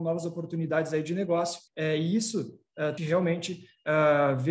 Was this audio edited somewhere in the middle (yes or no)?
yes